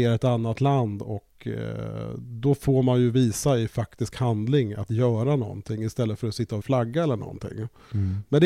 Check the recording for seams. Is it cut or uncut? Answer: cut